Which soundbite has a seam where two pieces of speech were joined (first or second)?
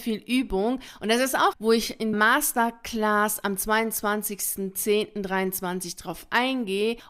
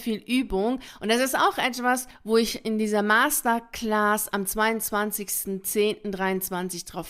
first